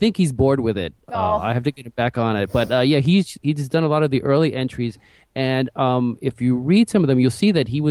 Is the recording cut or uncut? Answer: uncut